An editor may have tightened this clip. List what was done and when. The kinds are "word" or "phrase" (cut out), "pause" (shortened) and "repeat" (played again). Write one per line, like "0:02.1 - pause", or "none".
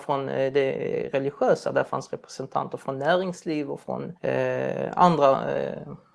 0:04.2 - pause